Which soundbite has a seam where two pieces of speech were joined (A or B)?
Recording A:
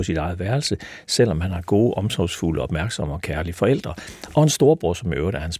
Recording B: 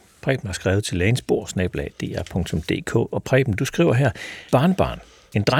B